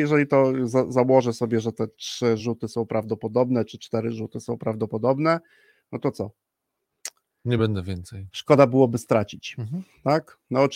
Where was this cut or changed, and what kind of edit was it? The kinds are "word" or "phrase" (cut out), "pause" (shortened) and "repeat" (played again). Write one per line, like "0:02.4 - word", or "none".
none